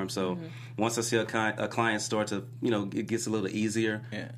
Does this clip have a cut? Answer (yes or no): no